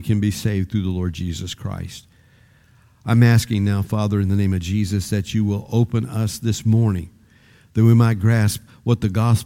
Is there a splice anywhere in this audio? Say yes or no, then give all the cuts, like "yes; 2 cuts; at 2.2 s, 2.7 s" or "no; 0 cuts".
no; 0 cuts